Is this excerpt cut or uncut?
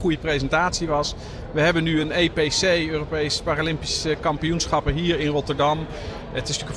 uncut